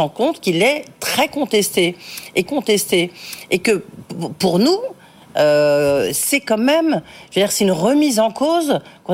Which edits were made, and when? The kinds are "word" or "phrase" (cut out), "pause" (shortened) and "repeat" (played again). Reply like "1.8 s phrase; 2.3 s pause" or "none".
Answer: 2.4 s repeat

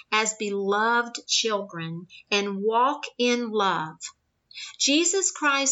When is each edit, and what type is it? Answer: none

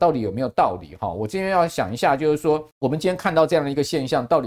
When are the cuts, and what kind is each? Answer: 2.7 s pause

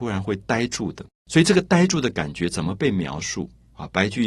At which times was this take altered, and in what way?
1.1 s pause

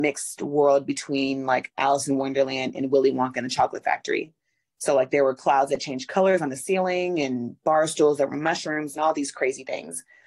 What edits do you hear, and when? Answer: none

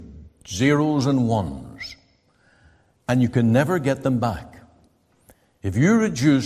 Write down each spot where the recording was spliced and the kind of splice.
none

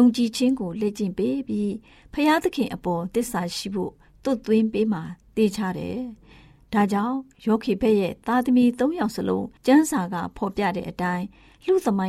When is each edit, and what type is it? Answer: 9.6 s pause

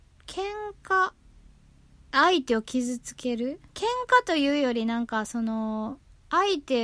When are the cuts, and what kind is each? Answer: 3.7 s pause

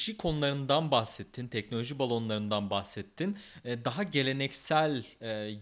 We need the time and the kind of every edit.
none

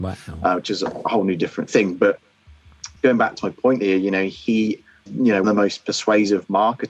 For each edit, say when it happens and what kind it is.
3.0 s pause; 5.1 s word; 5.4 s word

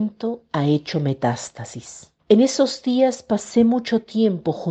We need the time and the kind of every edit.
2.2 s pause

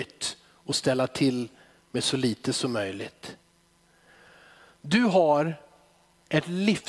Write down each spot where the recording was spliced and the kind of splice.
none

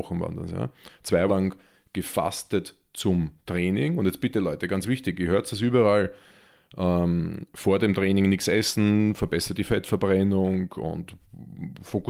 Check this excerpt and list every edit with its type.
1.3 s word

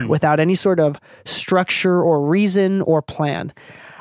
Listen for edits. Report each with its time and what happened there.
none

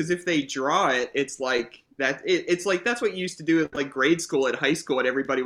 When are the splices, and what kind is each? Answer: none

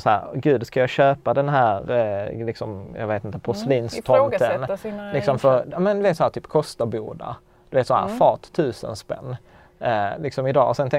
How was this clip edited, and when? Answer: none

